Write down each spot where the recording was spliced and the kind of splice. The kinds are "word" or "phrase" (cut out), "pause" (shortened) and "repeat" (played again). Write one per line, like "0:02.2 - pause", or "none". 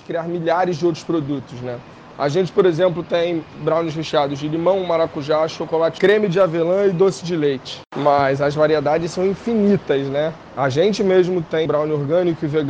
0:06.0 - word
0:11.7 - word

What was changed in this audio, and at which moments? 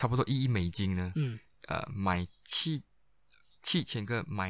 none

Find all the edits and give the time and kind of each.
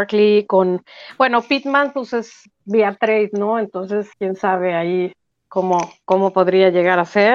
0:04.1 - pause

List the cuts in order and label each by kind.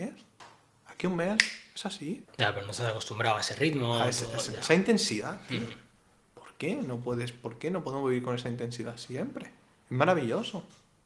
0:02.2 - pause

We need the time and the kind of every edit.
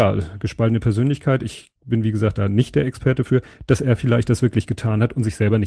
0:01.8 - pause

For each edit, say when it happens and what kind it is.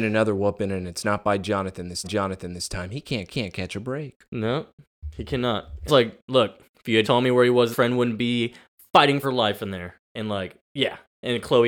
0:02.0 - repeat
0:03.3 - repeat
0:05.9 - phrase
0:07.0 - word
0:07.7 - phrase
0:09.2 - word
0:10.1 - pause
0:10.6 - pause

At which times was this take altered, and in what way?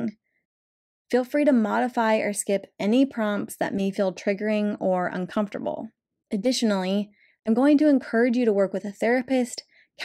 none

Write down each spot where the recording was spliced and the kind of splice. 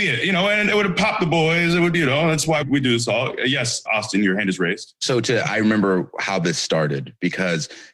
0:02.6 - word
0:03.9 - word

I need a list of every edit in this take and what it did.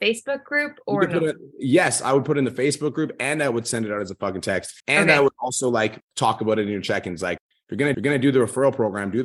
0:04.8 - pause
0:07.9 - repeat

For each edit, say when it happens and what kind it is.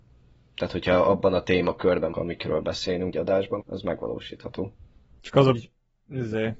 0:02.1 - word
0:03.1 - word
0:03.6 - word
0:05.5 - word

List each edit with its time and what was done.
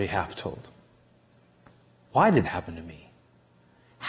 0:02.4 - word

